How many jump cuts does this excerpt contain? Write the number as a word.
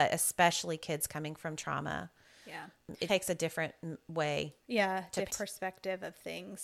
three